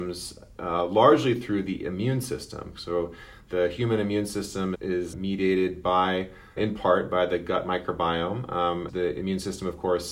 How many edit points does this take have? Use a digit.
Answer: 4